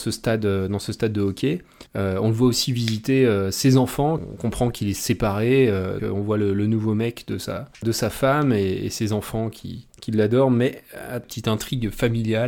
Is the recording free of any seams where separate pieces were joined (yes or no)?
no